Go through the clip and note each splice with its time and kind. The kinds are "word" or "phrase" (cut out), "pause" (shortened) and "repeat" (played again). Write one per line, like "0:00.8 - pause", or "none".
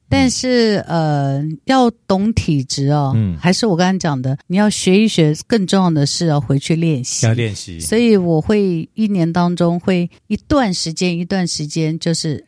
0:04.4 - pause
0:10.2 - pause

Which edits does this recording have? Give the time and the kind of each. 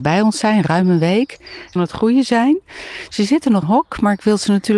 0:01.8 - phrase
0:03.6 - phrase

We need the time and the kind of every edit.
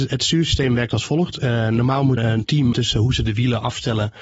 0:02.2 - word
0:02.7 - phrase

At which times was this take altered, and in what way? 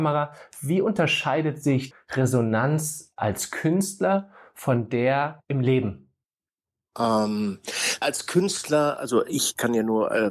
0:01.9 - word
0:08.0 - word

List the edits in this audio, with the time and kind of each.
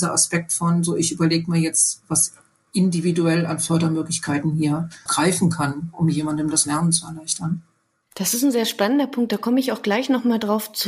0:05.1 - word

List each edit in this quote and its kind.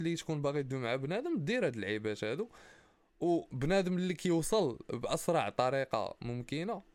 none

